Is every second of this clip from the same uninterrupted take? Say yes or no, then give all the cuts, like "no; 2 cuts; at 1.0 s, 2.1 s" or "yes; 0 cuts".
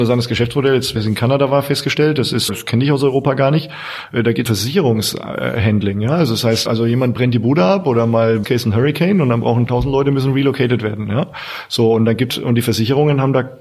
no; 7 cuts; at 1.0 s, 2.5 s, 4.5 s, 6.7 s, 8.4 s, 9.7 s, 12.3 s